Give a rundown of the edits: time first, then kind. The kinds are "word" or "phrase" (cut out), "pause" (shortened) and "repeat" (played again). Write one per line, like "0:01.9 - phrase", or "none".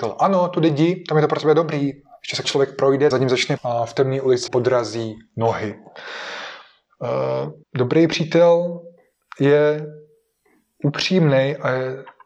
0:02.4 - phrase
0:03.1 - phrase
0:03.6 - word
0:04.5 - word
0:07.6 - pause